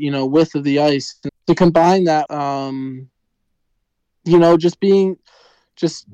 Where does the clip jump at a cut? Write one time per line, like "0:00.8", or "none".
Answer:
0:01.3
0:02.3